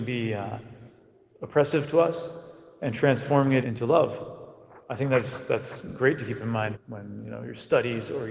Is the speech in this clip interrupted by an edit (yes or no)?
yes